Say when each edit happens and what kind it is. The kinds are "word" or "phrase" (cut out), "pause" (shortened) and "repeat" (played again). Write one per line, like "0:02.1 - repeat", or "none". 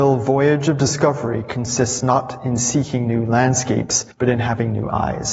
0:04.1 - pause